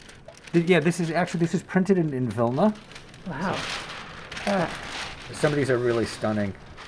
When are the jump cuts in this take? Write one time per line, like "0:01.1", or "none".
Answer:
none